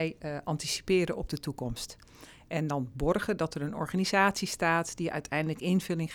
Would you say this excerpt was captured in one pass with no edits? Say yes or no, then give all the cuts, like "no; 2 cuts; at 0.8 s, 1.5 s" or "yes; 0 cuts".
yes; 0 cuts